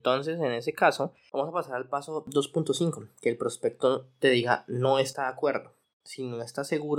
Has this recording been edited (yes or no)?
yes